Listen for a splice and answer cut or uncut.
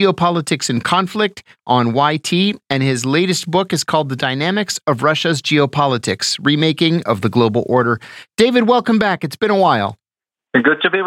uncut